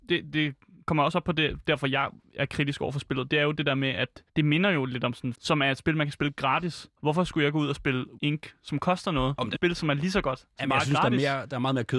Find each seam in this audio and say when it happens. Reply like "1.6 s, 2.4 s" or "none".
4.3 s, 5.3 s, 7.0 s, 8.2 s, 9.5 s